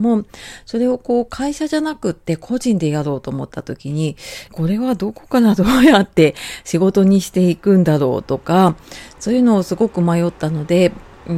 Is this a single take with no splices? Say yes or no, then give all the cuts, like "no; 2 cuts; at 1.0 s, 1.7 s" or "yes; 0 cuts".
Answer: no; 1 cut; at 4.5 s